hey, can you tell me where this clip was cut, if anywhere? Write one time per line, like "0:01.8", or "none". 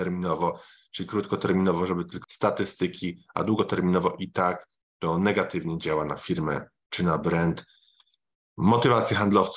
0:02.2